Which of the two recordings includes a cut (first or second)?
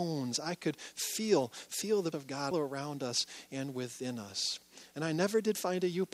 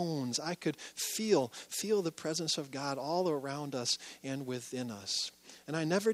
first